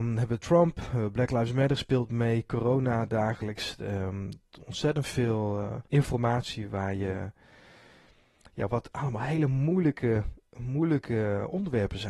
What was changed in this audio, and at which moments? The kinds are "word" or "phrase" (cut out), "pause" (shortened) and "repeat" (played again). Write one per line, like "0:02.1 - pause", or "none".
0:05.9 - pause